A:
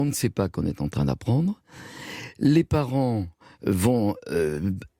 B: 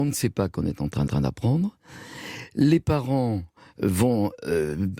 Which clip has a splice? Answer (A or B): B